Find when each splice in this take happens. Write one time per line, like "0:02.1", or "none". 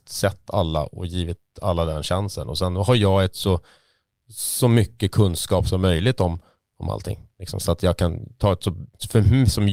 none

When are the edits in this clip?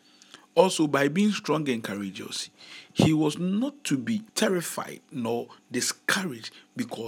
0:04.3

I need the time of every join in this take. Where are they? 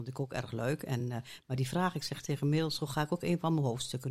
none

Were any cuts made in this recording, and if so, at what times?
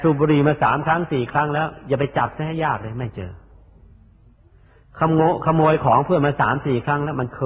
none

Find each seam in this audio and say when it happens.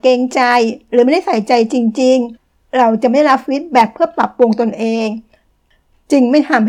0:02.4

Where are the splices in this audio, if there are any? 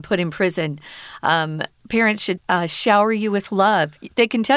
0:02.4

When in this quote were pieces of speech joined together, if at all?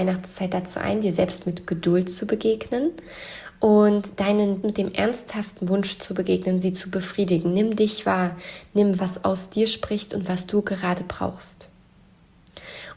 0:04.6
0:09.0

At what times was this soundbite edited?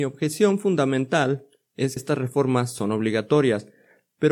0:02.0

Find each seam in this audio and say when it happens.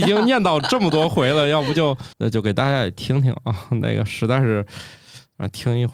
0:02.1

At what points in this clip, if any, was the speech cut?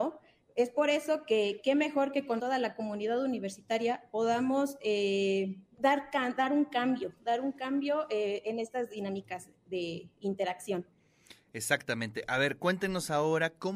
0:02.4
0:05.7

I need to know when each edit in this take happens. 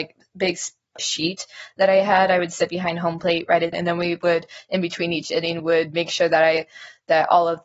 0:01.0
0:03.7
0:05.6

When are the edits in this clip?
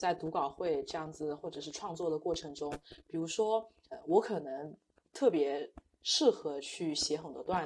none

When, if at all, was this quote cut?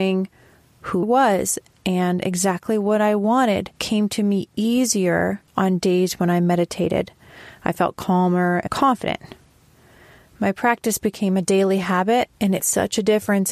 0:01.0
0:03.7
0:05.5
0:08.7
0:12.6

